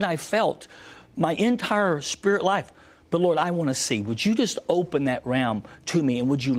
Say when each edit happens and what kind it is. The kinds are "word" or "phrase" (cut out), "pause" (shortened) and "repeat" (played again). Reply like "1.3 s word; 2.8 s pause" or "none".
none